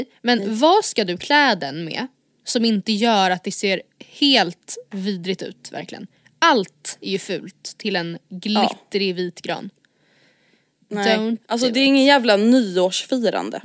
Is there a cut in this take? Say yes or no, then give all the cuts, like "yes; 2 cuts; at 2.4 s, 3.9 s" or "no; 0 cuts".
no; 0 cuts